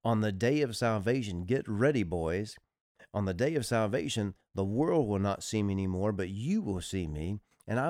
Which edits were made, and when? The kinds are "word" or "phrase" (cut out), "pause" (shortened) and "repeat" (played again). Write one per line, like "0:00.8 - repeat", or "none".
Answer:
none